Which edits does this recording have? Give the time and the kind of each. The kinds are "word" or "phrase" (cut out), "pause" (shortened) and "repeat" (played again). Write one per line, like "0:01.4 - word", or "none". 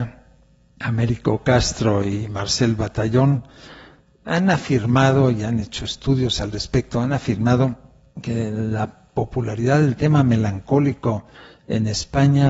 none